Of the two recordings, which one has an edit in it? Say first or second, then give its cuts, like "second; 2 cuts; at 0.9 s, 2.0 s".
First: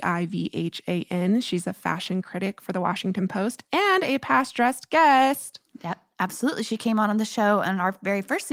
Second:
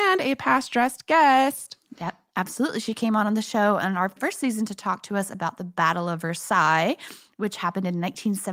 second; 1 cut; at 4.2 s